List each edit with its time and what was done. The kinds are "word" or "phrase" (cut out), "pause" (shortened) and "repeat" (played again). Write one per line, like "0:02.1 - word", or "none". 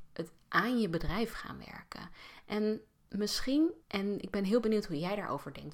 0:03.8 - pause